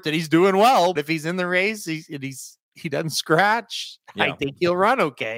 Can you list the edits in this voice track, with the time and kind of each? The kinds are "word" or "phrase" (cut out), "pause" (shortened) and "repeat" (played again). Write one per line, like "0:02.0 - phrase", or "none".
0:01.0 - word